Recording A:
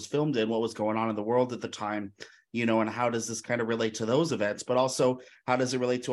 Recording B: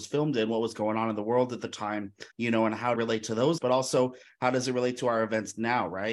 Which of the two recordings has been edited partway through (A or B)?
B